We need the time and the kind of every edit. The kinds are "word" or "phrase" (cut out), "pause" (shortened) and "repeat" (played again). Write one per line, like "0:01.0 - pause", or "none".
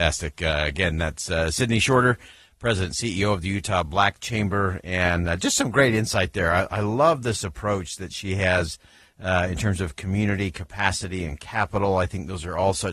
none